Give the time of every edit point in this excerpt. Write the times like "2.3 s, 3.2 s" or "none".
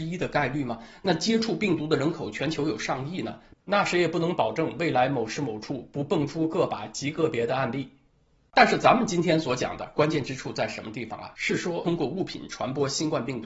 none